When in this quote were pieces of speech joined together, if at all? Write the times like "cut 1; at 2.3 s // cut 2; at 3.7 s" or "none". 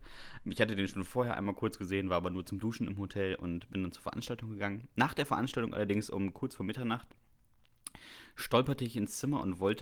none